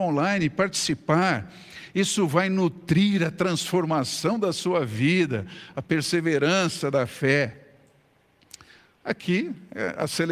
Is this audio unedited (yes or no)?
yes